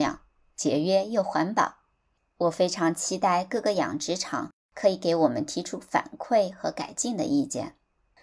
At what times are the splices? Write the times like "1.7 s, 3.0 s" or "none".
none